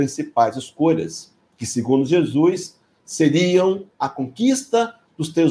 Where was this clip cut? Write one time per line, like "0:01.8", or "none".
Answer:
none